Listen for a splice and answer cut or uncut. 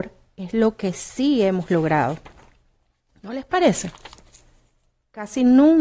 uncut